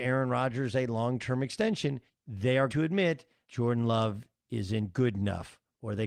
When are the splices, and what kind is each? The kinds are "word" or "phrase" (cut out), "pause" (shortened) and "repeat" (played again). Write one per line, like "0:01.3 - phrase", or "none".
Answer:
0:02.1 - pause
0:02.7 - word
0:03.4 - word

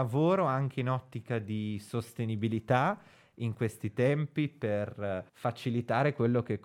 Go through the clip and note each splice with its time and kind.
0:05.3 - pause

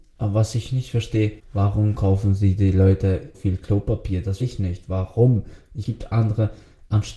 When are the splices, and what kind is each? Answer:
0:01.4 - pause
0:03.3 - word
0:04.4 - word
0:05.8 - phrase

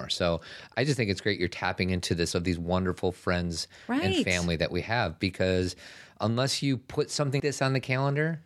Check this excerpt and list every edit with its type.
0:02.3 - phrase
0:07.4 - word

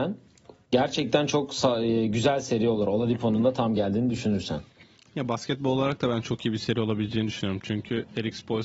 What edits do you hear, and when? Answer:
none

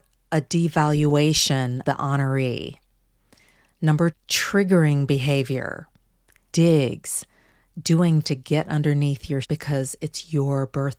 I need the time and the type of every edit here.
0:01.8 - word
0:04.1 - word
0:06.5 - word
0:08.2 - word
0:09.4 - word

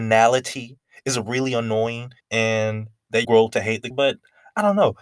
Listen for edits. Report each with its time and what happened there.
0:02.2 - pause
0:03.2 - word
0:03.9 - word

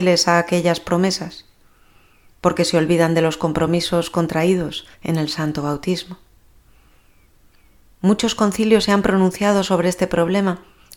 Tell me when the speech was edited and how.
0:04.9 - pause

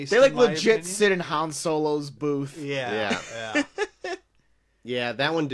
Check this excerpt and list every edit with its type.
none

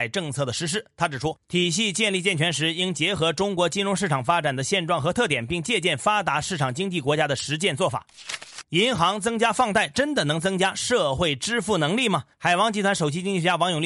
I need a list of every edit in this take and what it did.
0:12.3 - pause

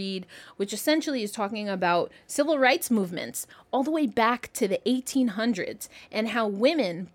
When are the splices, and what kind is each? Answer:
none

